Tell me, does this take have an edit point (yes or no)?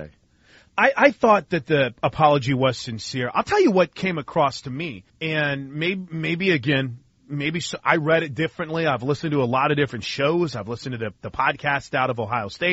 yes